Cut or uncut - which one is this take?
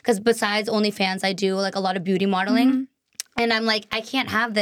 uncut